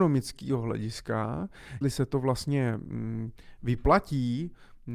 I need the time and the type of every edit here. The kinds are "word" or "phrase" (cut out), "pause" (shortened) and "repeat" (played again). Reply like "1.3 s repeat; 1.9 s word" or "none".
1.8 s word